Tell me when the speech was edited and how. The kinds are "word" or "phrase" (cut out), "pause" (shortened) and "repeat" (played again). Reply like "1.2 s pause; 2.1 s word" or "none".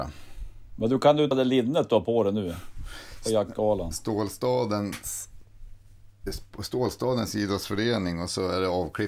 1.3 s word